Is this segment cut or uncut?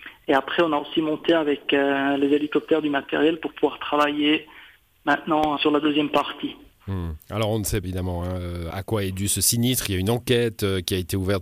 cut